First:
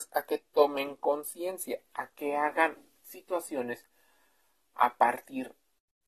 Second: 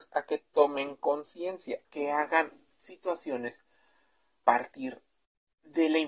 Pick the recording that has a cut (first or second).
second